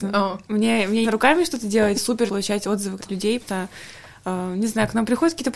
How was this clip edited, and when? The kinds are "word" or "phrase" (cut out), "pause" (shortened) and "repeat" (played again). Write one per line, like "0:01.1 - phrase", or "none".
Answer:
0:01.0 - word
0:01.9 - word
0:02.3 - word
0:03.0 - word
0:03.4 - word

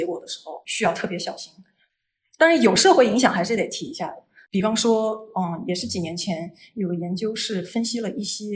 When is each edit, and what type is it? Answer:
none

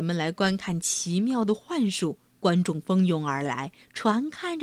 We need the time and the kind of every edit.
0:02.3 - pause

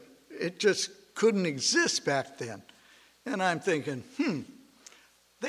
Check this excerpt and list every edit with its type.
none

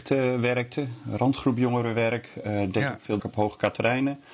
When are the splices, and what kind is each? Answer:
0:03.2 - word

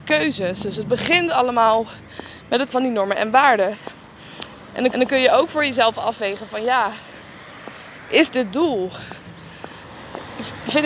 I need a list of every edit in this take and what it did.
0:02.7 - word
0:04.9 - repeat
0:08.5 - phrase

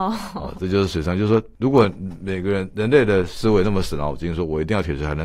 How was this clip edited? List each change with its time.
0:01.5 - pause

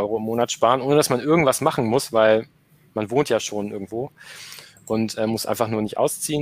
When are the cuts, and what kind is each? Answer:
none

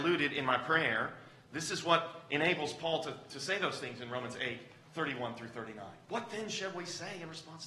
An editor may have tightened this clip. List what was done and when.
0:06.0 - pause

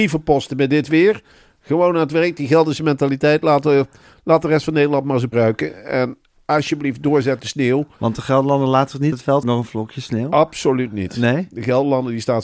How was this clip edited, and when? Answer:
0:05.3 - word
0:07.4 - word
0:09.1 - word
0:09.4 - word

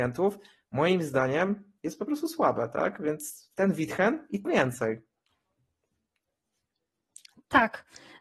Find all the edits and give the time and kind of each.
0:01.8 - pause
0:04.4 - phrase

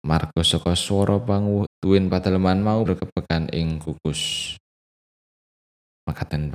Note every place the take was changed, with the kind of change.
0:01.7 - word
0:02.9 - word

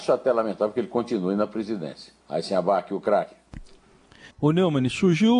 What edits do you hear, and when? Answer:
0:02.2 - pause
0:04.3 - pause

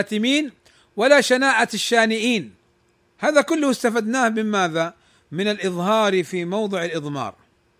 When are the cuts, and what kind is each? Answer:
none

